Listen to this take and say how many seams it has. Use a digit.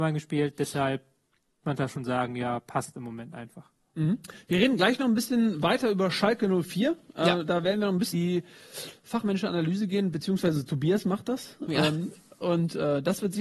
2